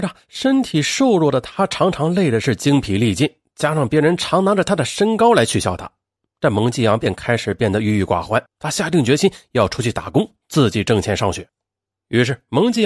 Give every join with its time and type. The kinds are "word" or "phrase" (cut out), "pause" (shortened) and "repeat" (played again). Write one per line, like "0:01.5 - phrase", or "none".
0:08.5 - pause